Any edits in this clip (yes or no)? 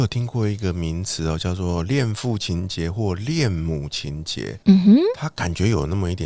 yes